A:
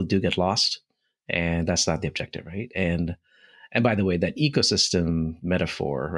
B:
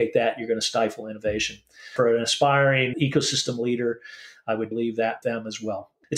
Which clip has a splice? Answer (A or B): B